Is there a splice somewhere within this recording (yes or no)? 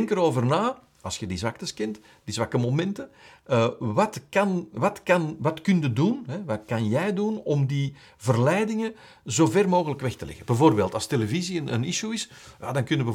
no